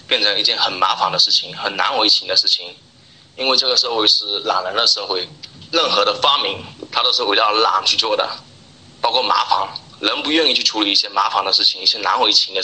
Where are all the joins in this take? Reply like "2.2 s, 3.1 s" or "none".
none